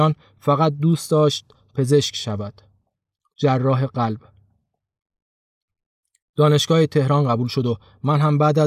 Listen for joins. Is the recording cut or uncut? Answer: uncut